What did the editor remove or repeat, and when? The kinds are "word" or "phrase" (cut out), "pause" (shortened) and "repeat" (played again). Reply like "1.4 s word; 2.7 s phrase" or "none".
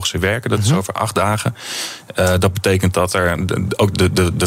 none